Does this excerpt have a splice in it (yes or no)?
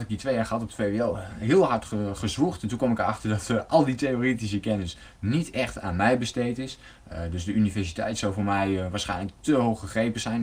no